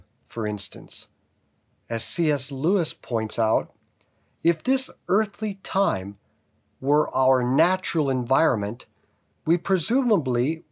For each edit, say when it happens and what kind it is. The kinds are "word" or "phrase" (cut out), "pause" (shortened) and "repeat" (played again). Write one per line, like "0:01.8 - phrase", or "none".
none